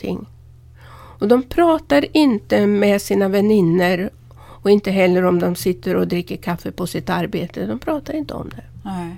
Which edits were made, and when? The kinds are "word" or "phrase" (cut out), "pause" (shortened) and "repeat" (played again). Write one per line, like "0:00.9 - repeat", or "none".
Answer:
none